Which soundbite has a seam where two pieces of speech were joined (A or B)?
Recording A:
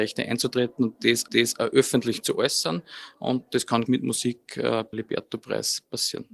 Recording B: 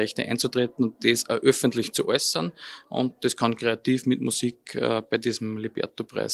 A